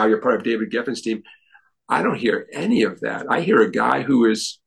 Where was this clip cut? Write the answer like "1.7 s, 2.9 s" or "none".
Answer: none